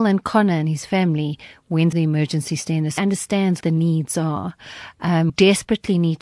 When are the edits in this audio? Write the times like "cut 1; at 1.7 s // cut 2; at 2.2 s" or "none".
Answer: cut 1; at 1.9 s // cut 2; at 3.0 s // cut 3; at 3.6 s // cut 4; at 5.3 s